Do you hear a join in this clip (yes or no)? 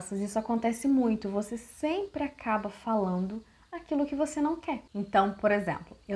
no